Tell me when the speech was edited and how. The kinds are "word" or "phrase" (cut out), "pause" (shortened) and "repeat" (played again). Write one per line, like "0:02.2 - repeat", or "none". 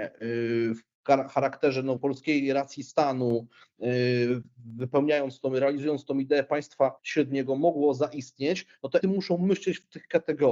0:02.0 - word
0:07.0 - pause
0:09.0 - word